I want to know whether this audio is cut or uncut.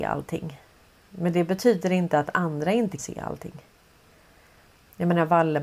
cut